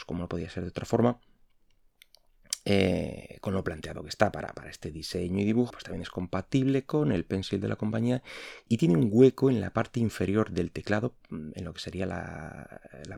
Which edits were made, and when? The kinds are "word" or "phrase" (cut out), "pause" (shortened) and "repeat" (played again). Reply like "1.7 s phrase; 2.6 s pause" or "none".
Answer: 5.7 s word; 8.7 s word